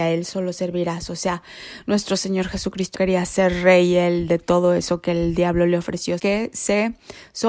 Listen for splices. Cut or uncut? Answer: cut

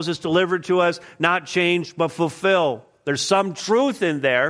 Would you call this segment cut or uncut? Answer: uncut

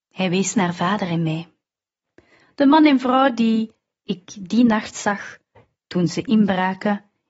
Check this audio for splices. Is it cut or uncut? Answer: uncut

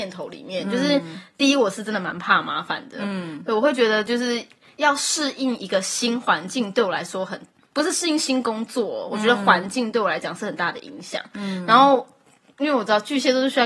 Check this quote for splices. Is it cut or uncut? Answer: uncut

